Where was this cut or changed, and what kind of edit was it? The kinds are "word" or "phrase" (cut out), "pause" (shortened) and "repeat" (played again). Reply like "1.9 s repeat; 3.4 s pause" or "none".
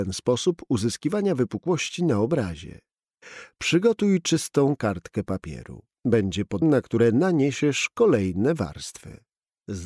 6.6 s word